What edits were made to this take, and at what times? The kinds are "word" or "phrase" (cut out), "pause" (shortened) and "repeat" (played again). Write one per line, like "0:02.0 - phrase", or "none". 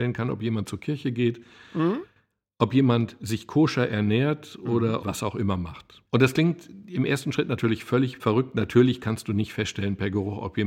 0:05.0 - phrase